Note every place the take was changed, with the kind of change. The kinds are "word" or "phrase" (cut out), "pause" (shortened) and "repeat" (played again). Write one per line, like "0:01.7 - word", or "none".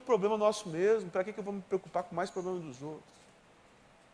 none